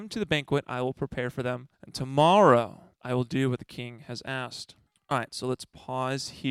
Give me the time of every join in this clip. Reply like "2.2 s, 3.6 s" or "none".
1.7 s, 2.9 s, 4.9 s